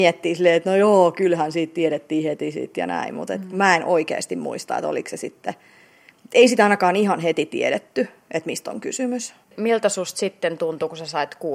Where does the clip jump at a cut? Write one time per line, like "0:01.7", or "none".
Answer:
0:09.4